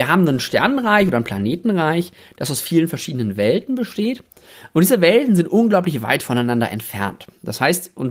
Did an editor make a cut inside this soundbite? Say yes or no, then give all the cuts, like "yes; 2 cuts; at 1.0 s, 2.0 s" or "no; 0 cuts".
no; 0 cuts